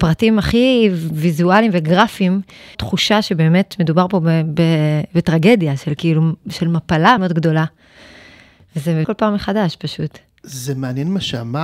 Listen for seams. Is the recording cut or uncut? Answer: cut